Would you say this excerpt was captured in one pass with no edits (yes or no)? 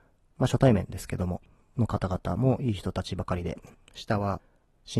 yes